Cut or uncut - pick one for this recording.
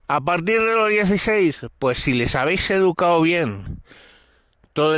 uncut